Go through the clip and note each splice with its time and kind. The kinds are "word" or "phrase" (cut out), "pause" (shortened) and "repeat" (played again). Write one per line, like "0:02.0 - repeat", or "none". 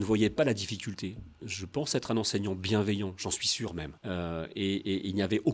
0:04.0 - pause